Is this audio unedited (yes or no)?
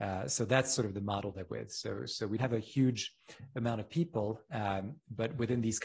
no